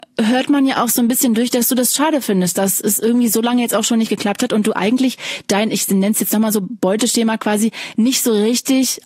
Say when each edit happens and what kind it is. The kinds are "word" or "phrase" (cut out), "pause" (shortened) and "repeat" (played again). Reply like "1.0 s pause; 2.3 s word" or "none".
none

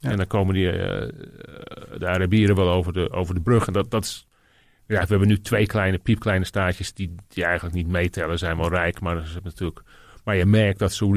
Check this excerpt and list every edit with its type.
none

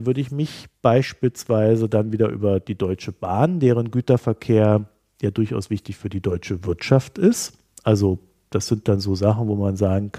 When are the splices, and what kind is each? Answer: none

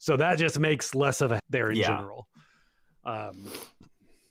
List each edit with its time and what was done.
1.4 s word

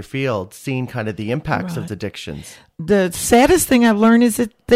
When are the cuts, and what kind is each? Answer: 1.9 s word

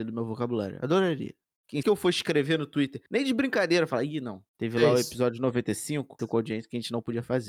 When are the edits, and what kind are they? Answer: 1.8 s word; 3.1 s pause; 4.5 s pause; 6.2 s phrase

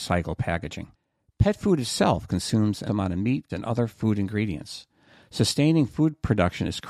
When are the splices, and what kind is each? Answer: 2.9 s word; 3.5 s word

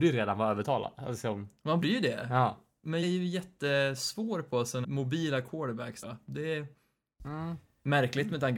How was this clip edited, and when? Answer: 1.8 s word; 3.0 s word; 4.8 s word; 6.0 s word

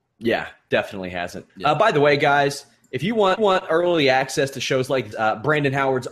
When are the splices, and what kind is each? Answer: 1.5 s pause; 3.4 s repeat; 5.1 s word

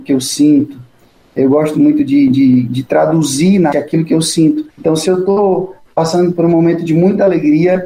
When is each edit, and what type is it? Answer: 3.7 s word; 4.7 s pause

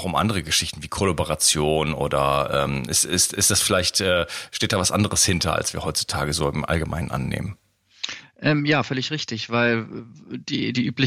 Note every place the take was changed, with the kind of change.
none

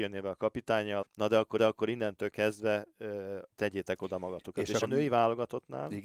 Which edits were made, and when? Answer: 1.0 s phrase; 1.6 s repeat; 3.5 s pause; 4.8 s word

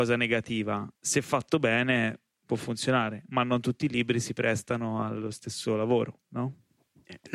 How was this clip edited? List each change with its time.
1.0 s pause; 6.2 s pause

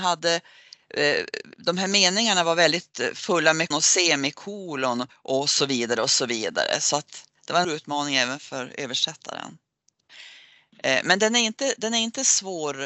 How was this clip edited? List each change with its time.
3.7 s word; 5.1 s pause; 7.6 s word

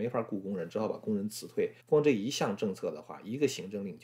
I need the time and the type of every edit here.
1.8 s pause

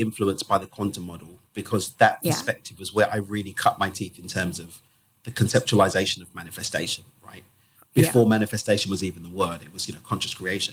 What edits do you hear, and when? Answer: 1.5 s pause

